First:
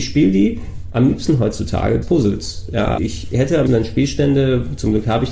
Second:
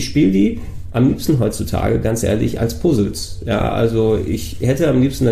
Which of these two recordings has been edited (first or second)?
first